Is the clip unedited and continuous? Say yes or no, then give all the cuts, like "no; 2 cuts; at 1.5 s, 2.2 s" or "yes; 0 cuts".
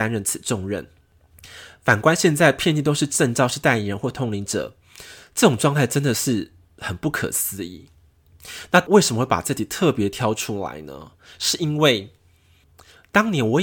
yes; 0 cuts